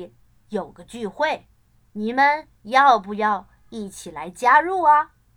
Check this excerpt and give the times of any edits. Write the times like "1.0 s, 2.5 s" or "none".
1.8 s, 2.6 s